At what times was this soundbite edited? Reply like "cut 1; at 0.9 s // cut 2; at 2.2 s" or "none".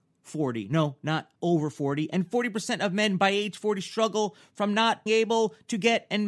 cut 1; at 1.4 s // cut 2; at 5.1 s